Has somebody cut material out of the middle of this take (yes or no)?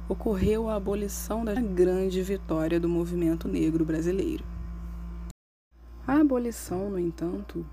yes